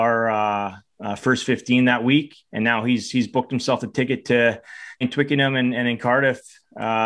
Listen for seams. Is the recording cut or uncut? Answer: cut